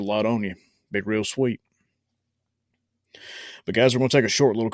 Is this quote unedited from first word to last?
yes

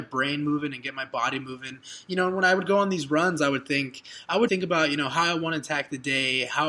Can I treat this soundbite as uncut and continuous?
no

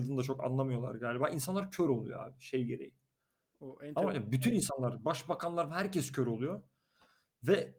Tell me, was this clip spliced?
no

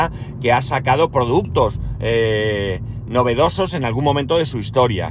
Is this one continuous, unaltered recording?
yes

